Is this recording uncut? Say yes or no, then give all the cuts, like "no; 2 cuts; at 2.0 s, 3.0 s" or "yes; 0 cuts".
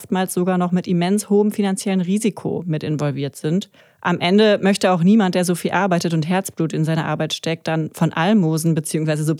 no; 1 cut; at 3.8 s